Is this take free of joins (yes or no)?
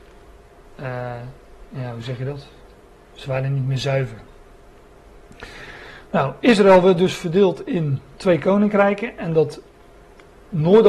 yes